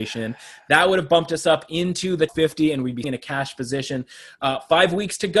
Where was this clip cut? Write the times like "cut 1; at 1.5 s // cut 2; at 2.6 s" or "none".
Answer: cut 1; at 2.3 s // cut 2; at 3.0 s